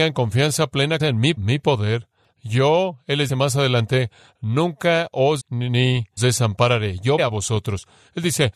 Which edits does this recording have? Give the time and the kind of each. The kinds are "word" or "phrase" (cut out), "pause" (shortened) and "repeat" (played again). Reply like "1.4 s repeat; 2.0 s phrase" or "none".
1.0 s word; 1.4 s word; 3.3 s word; 5.4 s word; 6.2 s word; 7.2 s word